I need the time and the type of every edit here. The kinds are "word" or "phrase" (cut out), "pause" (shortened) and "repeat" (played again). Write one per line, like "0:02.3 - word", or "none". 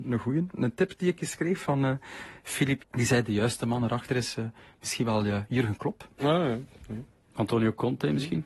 0:02.8 - phrase
0:06.1 - pause

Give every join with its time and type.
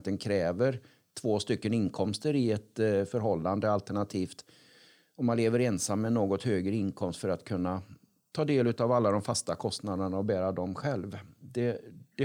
none

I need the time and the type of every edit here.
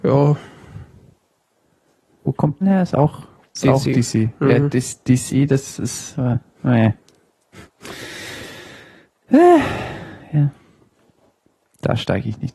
0:02.6 - word

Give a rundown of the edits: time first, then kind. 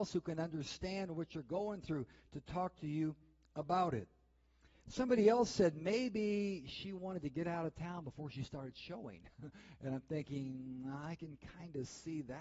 none

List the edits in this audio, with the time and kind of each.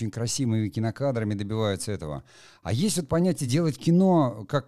none

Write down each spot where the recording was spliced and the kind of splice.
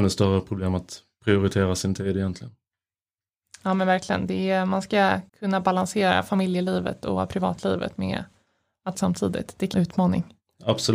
0:05.3 - pause
0:08.9 - phrase
0:09.7 - phrase

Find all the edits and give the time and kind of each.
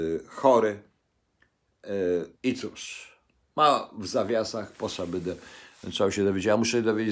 0:02.4 - pause
0:03.4 - pause

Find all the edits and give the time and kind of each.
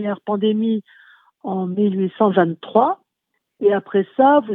none

